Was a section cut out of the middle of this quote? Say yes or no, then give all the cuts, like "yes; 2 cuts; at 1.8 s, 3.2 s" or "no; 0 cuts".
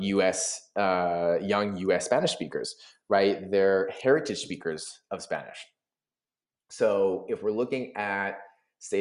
no; 0 cuts